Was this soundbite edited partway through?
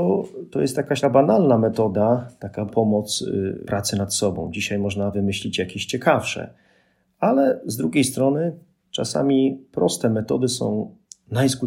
yes; 4 cuts; at 1.0 s, 2.7 s, 3.6 s, 5.1 s

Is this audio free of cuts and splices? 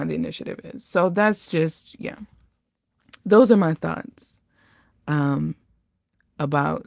yes; 0 cuts

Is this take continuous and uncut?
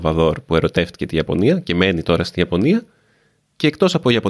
yes; 0 cuts

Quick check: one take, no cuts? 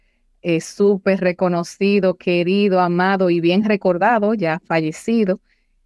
yes; 0 cuts

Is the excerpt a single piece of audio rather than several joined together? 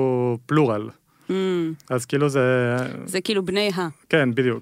yes; 0 cuts

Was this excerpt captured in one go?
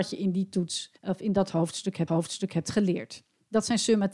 no; 2 cuts; at 1.0 s, 2.1 s

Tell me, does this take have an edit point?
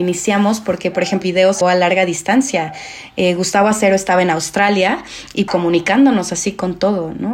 yes; 3 cuts; at 1.2 s, 1.6 s, 5.5 s

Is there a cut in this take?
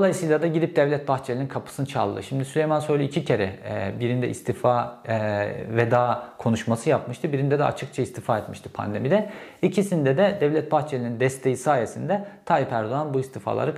no; 0 cuts

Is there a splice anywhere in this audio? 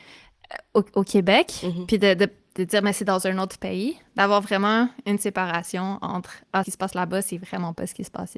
yes; 1 cut; at 6.6 s

